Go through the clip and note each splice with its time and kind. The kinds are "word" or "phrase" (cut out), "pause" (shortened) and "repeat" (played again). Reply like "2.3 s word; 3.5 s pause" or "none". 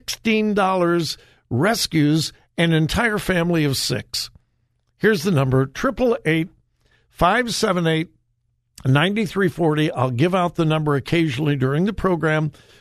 none